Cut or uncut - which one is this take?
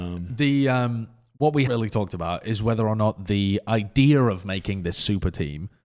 cut